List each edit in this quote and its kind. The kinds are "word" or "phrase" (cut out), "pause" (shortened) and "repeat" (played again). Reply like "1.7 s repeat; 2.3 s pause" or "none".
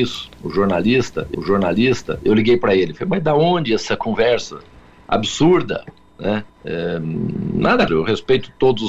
1.3 s repeat; 6.5 s pause; 7.9 s word

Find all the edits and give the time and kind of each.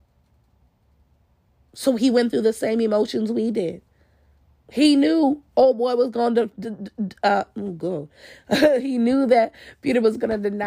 4.4 s pause

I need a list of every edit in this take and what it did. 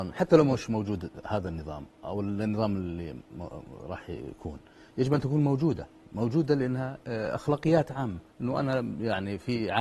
8.3 s pause

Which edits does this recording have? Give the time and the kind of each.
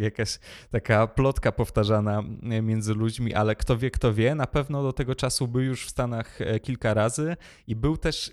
none

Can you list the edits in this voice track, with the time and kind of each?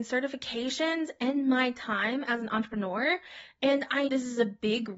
4.1 s word

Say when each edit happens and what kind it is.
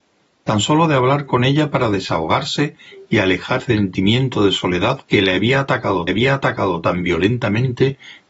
3.6 s word; 5.1 s pause; 6.1 s repeat

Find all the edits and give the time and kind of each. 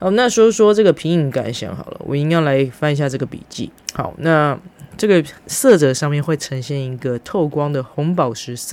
3.8 s pause; 5.4 s pause

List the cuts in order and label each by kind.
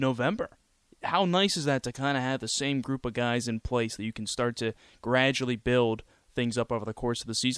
none

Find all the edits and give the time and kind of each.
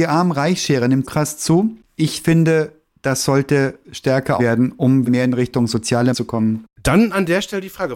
1.0 s word; 4.4 s word; 5.0 s word; 6.1 s word

